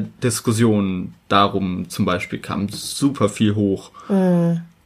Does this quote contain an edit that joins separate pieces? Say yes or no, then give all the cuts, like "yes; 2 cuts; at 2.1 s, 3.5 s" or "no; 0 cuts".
no; 0 cuts